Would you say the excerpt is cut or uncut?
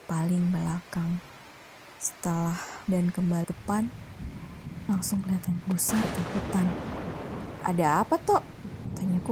cut